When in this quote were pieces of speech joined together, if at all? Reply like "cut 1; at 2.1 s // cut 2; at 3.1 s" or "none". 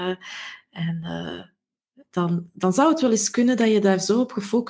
none

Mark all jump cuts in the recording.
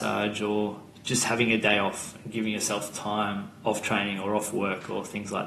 cut 1; at 0.9 s

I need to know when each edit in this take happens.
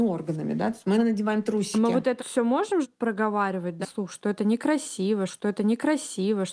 cut 1; at 1.0 s // cut 2; at 2.2 s // cut 3; at 2.8 s // cut 4; at 3.8 s // cut 5; at 5.3 s

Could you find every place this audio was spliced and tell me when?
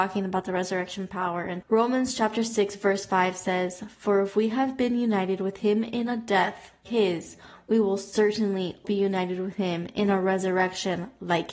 cut 1; at 1.6 s // cut 2; at 6.9 s // cut 3; at 8.8 s

